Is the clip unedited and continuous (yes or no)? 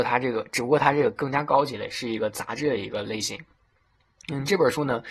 yes